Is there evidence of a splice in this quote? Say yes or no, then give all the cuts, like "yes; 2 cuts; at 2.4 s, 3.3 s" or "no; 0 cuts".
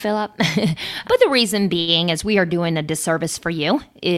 yes; 1 cut; at 1.0 s